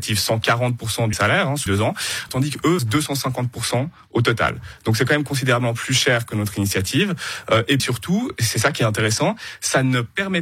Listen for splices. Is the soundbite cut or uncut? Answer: cut